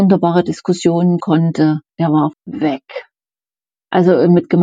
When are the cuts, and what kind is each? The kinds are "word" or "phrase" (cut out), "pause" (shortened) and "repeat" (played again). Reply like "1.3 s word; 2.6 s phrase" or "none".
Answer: 1.2 s word; 1.9 s pause; 2.3 s word

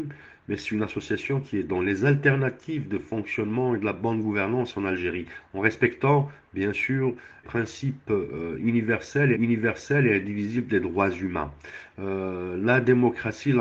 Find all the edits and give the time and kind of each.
7.4 s word; 9.3 s repeat

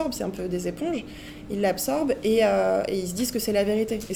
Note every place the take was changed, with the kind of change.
none

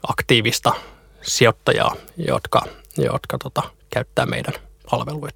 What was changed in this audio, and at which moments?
none

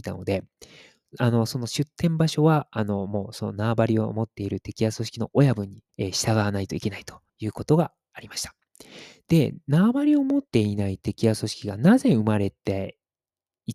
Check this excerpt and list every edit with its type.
5.9 s pause; 7.3 s pause; 10.5 s pause

